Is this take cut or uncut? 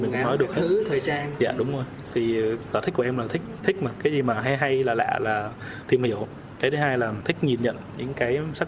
uncut